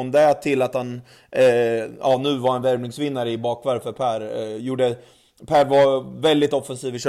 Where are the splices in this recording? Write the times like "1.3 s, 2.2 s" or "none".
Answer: none

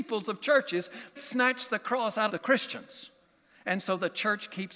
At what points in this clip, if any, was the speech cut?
1.2 s, 2.3 s

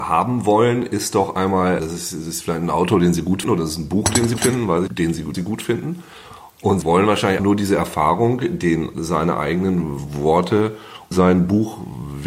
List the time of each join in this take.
1.8 s, 3.4 s, 4.4 s, 4.9 s, 5.3 s, 6.8 s, 7.4 s, 8.9 s, 11.1 s

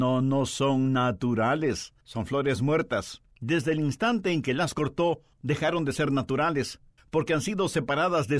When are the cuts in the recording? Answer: 2.0 s, 3.3 s, 5.3 s, 7.0 s

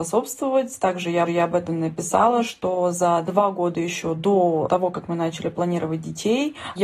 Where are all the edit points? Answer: 1.3 s

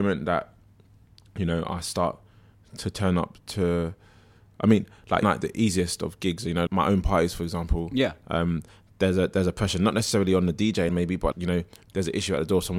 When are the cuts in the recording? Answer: 5.2 s, 6.7 s, 10.9 s, 11.3 s

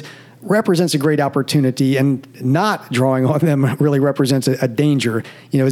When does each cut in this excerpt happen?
none

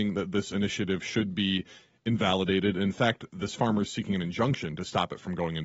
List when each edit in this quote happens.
none

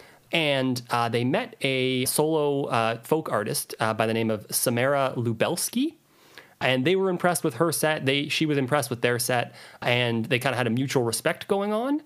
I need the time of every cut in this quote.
2.0 s

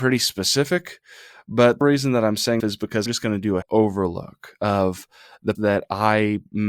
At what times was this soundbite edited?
1.8 s, 2.6 s, 3.1 s, 3.6 s, 5.5 s

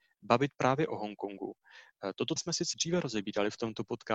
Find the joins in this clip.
2.4 s, 2.7 s

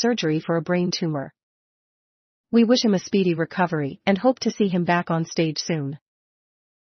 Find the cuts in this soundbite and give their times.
none

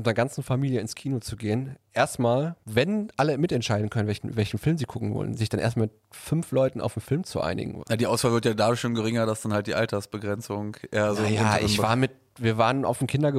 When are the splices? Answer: none

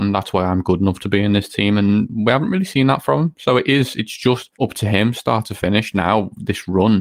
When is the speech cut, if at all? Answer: 4.5 s

